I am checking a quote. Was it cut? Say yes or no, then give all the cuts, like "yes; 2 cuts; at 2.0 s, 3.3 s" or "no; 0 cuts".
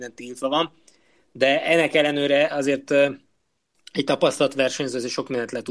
no; 0 cuts